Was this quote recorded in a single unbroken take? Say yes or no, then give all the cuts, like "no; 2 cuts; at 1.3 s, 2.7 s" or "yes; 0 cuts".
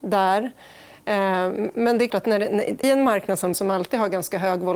no; 3 cuts; at 2.1 s, 2.8 s, 3.5 s